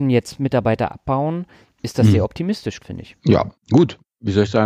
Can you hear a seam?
yes; 1 cut; at 2.8 s

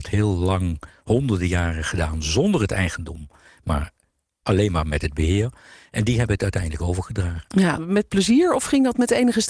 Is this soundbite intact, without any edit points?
no; 1 cut; at 7.8 s

